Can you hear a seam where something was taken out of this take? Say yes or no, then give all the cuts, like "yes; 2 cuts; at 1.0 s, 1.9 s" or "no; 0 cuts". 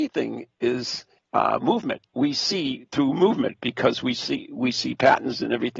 yes; 1 cut; at 1.2 s